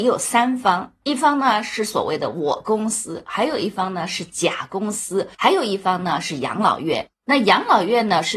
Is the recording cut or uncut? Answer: cut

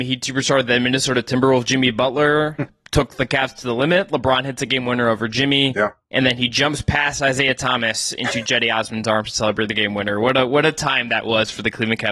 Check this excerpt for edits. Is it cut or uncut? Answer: uncut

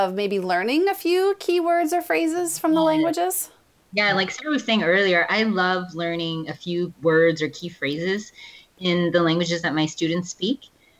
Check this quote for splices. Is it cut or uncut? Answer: uncut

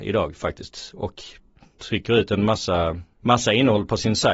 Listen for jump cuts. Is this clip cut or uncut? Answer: uncut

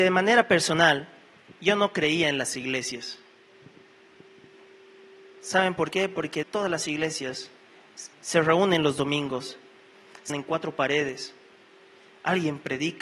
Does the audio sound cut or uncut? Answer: cut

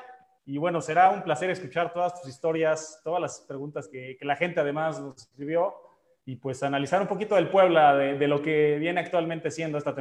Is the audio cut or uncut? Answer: uncut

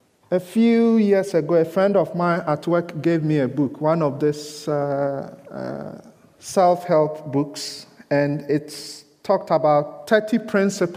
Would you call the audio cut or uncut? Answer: uncut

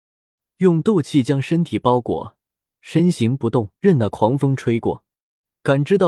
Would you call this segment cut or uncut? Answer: cut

